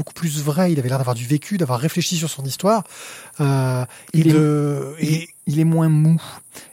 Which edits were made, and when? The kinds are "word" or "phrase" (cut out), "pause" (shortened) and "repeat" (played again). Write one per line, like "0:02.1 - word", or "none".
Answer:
0:05.4 - pause